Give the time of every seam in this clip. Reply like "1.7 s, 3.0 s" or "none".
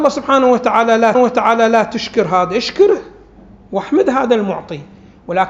1.1 s